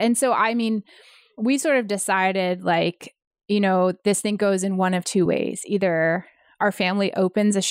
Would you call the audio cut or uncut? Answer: uncut